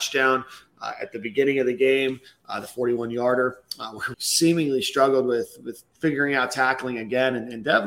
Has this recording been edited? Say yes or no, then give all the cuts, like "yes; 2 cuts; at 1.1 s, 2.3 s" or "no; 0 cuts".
yes; 1 cut; at 4.1 s